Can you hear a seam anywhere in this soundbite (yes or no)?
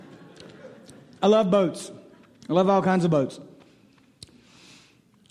no